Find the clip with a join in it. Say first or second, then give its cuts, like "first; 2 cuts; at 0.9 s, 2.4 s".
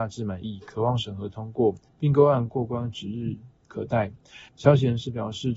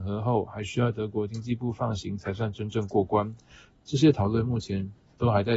first; 2 cuts; at 1.9 s, 4.5 s